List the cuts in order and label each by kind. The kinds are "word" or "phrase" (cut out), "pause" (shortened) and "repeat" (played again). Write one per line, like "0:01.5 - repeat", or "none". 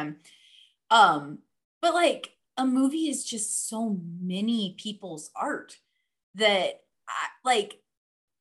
none